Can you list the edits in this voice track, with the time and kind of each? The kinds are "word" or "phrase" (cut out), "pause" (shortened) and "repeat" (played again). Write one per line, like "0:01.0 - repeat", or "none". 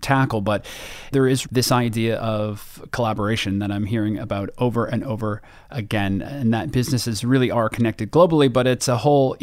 0:01.4 - word
0:06.2 - word